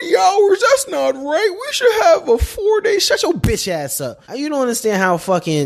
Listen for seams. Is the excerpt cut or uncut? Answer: cut